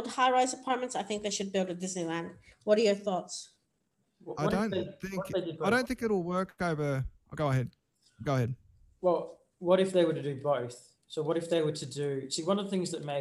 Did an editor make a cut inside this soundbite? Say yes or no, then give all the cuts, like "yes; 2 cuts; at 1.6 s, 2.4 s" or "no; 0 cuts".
no; 0 cuts